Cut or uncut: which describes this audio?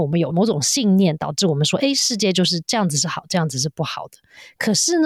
uncut